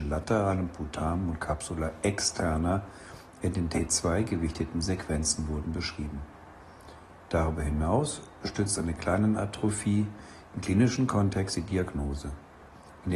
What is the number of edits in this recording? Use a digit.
0